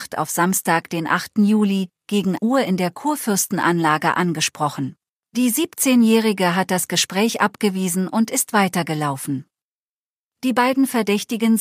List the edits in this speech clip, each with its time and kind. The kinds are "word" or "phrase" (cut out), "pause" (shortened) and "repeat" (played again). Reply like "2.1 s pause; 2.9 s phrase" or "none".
2.4 s word; 5.1 s pause